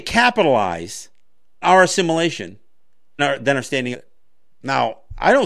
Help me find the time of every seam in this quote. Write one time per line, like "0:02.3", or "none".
0:01.6
0:03.2
0:03.9